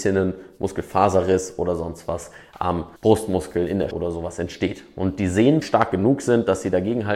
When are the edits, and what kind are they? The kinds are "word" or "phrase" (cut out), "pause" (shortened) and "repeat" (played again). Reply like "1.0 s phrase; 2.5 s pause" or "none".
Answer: 3.0 s pause; 3.9 s word; 5.6 s phrase

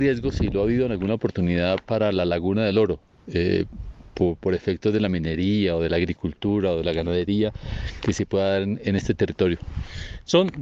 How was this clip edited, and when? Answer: none

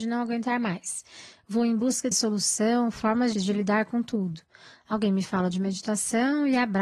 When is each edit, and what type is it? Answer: 2.1 s word; 3.4 s word

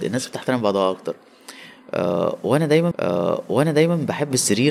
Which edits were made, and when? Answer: 2.9 s repeat

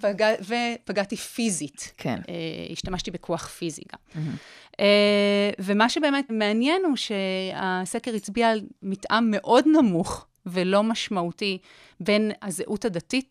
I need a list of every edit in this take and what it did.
6.3 s word

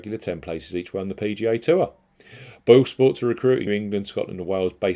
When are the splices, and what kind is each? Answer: 3.7 s word

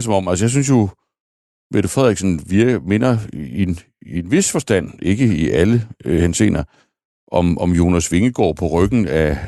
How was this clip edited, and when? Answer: none

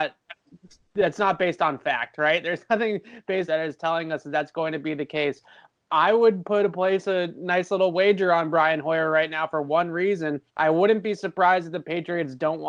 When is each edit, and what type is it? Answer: 3.5 s phrase; 10.5 s pause

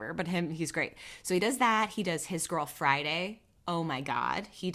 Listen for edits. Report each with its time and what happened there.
none

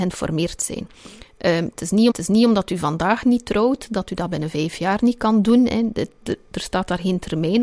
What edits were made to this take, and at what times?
2.1 s repeat

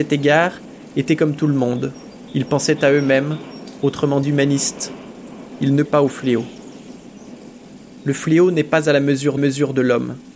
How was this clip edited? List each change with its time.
4.2 s phrase; 5.9 s word; 9.4 s repeat

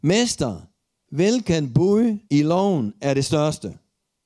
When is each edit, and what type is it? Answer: 2.2 s pause

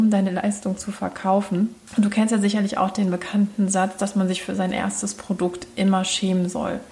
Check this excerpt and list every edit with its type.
none

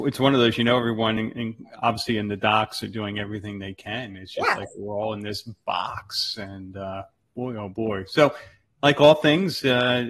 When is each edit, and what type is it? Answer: none

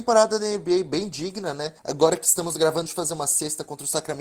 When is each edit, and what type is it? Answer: 1.8 s pause; 2.9 s phrase

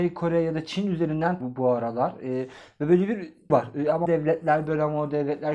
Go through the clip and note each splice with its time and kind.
1.4 s word; 3.5 s word; 4.0 s word

